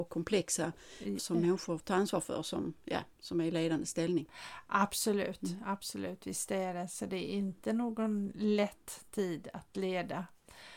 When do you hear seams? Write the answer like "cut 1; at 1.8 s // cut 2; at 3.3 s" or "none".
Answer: cut 1; at 1.2 s // cut 2; at 1.8 s